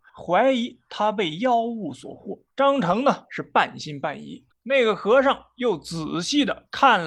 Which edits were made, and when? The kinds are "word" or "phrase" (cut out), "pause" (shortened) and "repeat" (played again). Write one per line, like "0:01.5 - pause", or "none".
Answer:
0:02.5 - pause
0:04.5 - pause